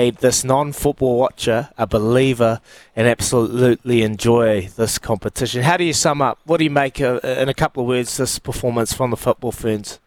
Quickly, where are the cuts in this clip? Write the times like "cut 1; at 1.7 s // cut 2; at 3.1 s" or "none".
none